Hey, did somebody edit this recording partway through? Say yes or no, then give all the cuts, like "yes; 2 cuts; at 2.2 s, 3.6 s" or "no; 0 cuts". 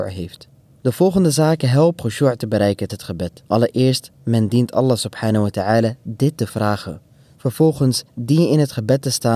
yes; 4 cuts; at 2.0 s, 2.9 s, 3.5 s, 8.1 s